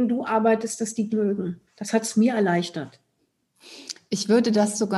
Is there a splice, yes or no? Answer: yes